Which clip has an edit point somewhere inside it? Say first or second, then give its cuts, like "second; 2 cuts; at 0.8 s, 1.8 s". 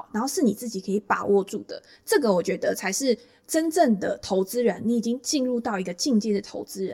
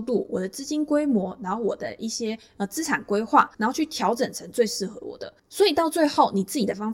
second; 1 cut; at 3.5 s